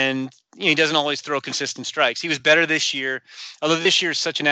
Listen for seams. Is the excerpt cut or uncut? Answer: uncut